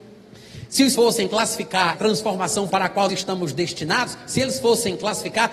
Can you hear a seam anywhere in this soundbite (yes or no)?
yes